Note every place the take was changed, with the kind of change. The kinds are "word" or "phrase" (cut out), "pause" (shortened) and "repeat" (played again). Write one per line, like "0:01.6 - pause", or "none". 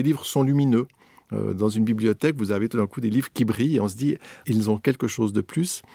0:04.4 - word